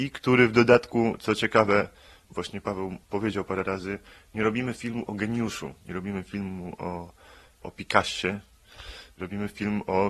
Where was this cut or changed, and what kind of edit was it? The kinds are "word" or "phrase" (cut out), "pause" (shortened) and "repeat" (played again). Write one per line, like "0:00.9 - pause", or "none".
none